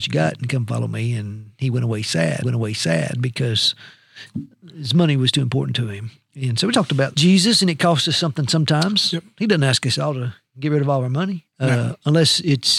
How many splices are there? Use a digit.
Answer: 3